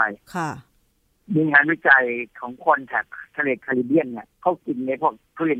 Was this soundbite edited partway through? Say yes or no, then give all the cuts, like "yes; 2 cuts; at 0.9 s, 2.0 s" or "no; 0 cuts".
yes; 1 cut; at 4.3 s